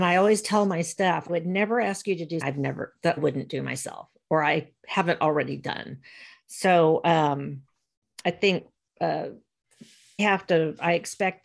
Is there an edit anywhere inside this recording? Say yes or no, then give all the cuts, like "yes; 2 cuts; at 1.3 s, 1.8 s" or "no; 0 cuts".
yes; 4 cuts; at 1.3 s, 2.4 s, 3.2 s, 10.2 s